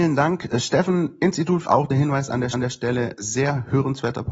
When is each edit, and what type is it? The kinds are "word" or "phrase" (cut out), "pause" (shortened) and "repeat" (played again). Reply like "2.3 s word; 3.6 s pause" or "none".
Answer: 1.6 s phrase; 2.5 s repeat